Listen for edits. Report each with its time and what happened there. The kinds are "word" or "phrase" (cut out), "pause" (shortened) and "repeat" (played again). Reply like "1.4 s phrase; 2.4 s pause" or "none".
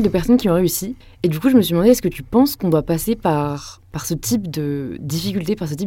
1.0 s pause